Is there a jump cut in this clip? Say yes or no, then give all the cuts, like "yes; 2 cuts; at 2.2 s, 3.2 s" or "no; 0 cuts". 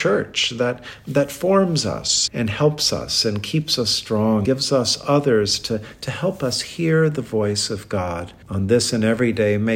yes; 3 cuts; at 2.3 s, 4.4 s, 8.4 s